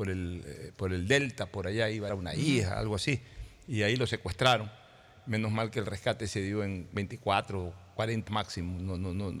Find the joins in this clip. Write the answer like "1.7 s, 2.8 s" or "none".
2.1 s, 8.3 s